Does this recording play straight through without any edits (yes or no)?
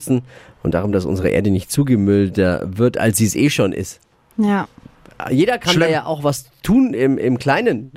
yes